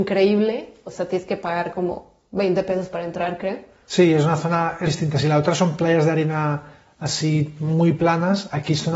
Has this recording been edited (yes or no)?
yes